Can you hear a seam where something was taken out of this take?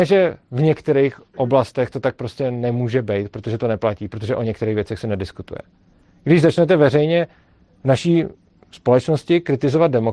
no; 0 cuts

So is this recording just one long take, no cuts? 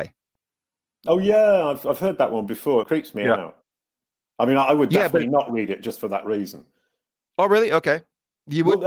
no; 1 cut; at 2.8 s

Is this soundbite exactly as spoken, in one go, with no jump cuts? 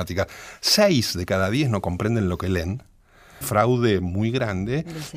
no; 1 cut; at 3.4 s

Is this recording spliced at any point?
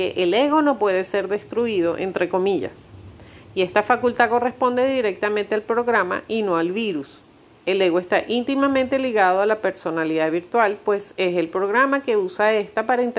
no; 0 cuts

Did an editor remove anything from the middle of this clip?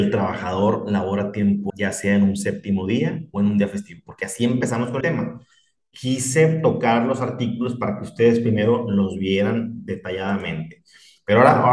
yes; 2 cuts; at 1.7 s, 5.0 s

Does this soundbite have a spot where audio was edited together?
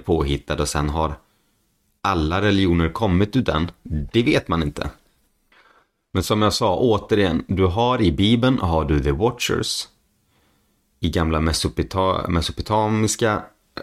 no; 0 cuts

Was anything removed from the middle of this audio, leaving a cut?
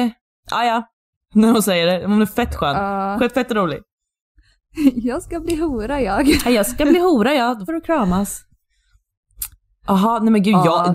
yes; 1 cut; at 7.7 s

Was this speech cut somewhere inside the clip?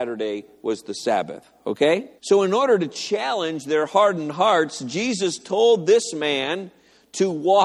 yes; 1 cut; at 2.2 s

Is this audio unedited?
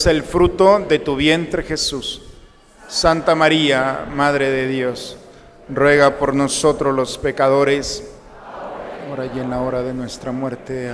yes; 0 cuts

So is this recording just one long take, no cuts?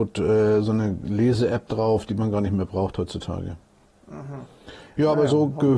yes; 0 cuts

